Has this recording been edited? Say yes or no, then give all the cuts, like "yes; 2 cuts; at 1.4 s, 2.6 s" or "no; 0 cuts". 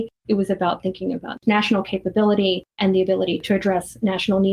no; 0 cuts